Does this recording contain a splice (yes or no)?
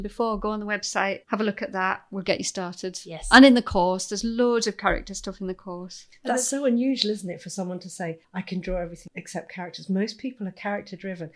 yes